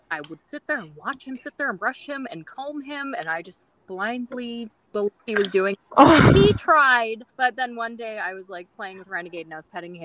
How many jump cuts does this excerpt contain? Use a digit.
3